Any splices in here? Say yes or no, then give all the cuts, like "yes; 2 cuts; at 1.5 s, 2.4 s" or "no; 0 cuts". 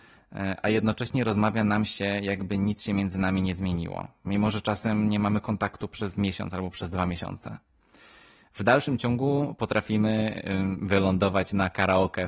no; 0 cuts